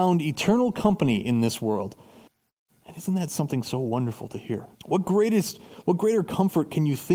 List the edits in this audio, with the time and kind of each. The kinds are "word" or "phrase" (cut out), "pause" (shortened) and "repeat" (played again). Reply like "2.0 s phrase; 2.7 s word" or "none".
2.3 s pause; 4.7 s pause